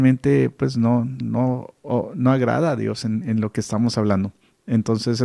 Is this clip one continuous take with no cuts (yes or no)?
no